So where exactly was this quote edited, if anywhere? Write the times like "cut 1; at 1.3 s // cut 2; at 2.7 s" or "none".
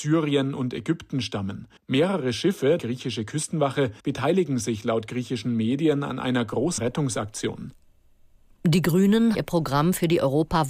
cut 1; at 1.8 s // cut 2; at 2.8 s // cut 3; at 4.0 s // cut 4; at 6.8 s // cut 5; at 9.3 s

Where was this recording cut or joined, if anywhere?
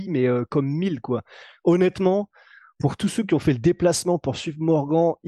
none

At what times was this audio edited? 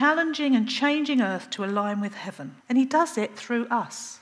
cut 1; at 2.6 s

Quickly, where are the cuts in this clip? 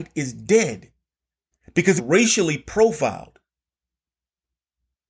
cut 1; at 2.0 s

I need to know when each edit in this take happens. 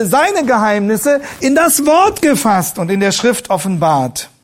none

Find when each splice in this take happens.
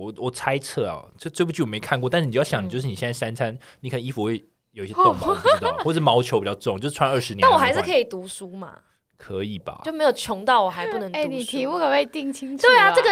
none

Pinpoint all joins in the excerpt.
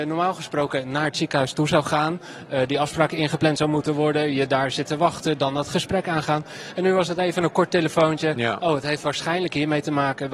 none

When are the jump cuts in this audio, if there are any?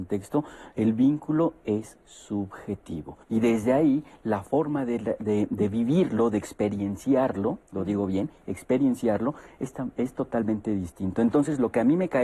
cut 1; at 3.2 s // cut 2; at 7.7 s

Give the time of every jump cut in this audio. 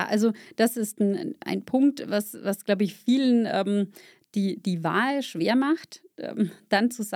none

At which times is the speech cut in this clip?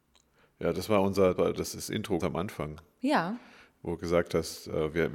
cut 1; at 1.4 s // cut 2; at 2.2 s

